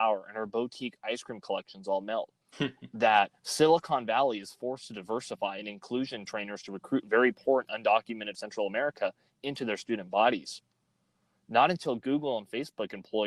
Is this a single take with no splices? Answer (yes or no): no